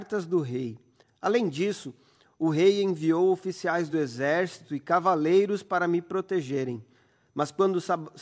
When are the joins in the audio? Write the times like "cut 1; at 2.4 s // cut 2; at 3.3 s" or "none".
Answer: none